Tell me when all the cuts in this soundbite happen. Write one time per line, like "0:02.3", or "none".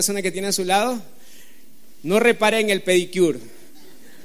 none